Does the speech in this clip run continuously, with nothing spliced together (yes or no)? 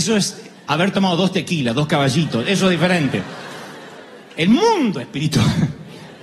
yes